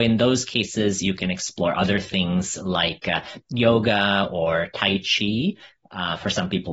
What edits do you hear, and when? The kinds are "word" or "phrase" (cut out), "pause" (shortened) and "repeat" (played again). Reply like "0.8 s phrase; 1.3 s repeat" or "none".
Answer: none